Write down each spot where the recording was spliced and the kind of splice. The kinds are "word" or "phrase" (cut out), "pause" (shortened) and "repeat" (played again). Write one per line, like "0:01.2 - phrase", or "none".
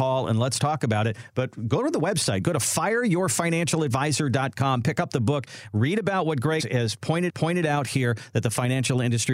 0:06.6 - word
0:07.3 - repeat